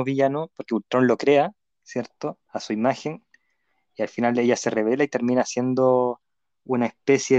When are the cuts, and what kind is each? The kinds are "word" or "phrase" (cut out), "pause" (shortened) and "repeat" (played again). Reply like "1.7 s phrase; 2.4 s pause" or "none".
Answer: none